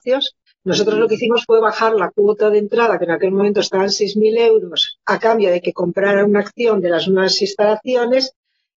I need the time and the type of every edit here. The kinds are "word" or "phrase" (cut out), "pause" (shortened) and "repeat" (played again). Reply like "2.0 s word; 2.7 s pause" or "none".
none